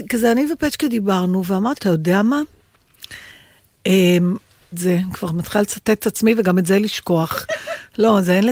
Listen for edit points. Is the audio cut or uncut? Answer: cut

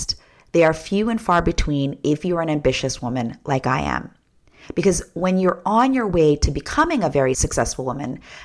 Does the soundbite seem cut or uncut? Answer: uncut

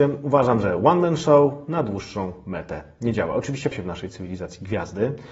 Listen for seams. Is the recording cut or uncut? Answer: cut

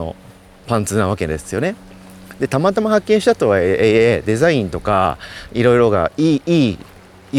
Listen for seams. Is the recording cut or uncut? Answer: uncut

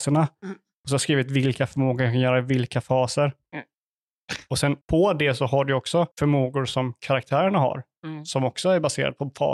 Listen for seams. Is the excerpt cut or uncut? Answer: cut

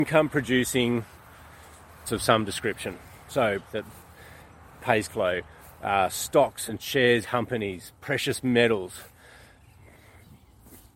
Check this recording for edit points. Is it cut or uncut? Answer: cut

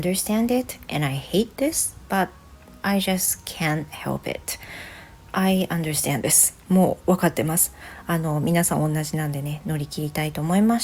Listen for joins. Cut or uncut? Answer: uncut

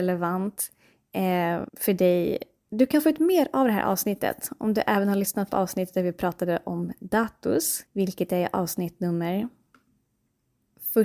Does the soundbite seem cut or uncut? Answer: cut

